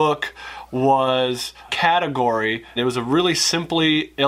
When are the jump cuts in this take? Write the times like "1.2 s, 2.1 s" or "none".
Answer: 1.7 s, 2.8 s